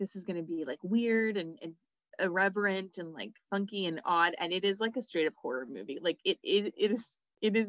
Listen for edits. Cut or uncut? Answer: uncut